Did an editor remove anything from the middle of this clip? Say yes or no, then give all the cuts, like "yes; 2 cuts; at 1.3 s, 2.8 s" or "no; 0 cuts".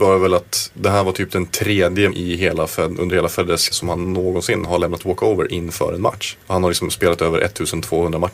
yes; 3 cuts; at 2.1 s, 3.7 s, 6.4 s